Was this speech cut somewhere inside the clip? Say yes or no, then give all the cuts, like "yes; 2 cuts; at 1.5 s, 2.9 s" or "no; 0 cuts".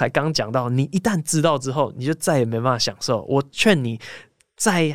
no; 0 cuts